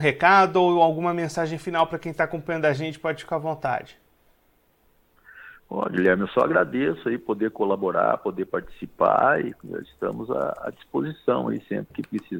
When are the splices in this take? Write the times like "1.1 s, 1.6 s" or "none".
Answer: none